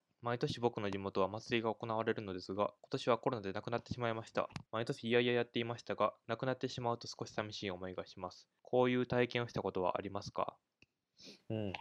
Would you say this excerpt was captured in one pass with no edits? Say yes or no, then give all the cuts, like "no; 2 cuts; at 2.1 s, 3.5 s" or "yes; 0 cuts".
no; 3 cuts; at 2.8 s, 4.7 s, 8.6 s